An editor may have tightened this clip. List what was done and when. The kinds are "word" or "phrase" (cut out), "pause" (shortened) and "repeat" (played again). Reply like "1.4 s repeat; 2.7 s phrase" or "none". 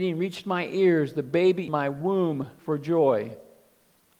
1.7 s word; 2.6 s word